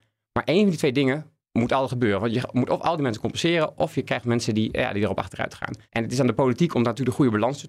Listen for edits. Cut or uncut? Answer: cut